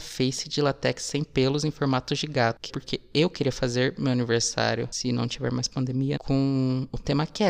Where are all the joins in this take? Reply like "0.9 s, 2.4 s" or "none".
2.7 s, 6.2 s